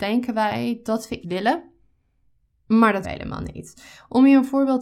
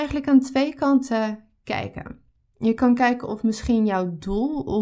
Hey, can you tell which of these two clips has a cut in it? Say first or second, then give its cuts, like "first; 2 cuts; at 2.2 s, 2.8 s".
first; 2 cuts; at 1.2 s, 3.0 s